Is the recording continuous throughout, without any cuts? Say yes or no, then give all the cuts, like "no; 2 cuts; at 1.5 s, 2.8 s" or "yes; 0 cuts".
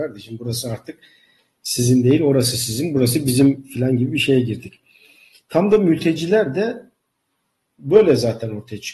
yes; 0 cuts